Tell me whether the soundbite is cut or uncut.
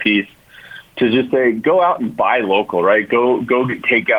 uncut